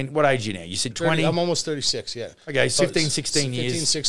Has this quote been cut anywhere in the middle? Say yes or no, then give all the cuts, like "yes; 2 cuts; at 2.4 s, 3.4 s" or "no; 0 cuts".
yes; 2 cuts; at 0.9 s, 2.8 s